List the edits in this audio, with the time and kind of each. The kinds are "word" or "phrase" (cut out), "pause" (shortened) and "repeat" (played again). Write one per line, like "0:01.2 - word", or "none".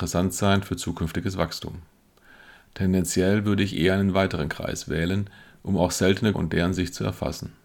0:06.3 - word